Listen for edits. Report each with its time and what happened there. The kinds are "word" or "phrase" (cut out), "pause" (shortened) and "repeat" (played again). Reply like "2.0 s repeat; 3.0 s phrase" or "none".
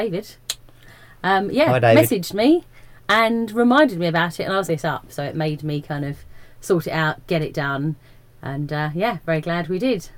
4.7 s phrase